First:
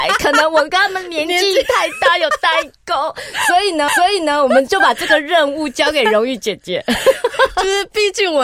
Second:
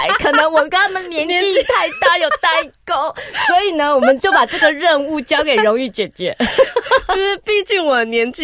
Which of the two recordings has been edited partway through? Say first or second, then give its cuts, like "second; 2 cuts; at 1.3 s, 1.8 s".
first; 1 cut; at 3.9 s